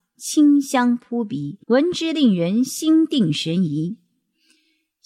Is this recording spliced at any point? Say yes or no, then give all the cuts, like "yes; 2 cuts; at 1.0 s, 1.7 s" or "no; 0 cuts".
yes; 1 cut; at 1.6 s